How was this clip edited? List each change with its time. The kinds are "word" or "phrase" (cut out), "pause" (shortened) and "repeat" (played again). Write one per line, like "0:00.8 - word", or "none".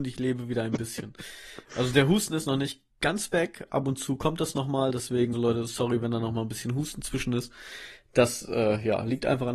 0:02.9 - pause
0:05.3 - word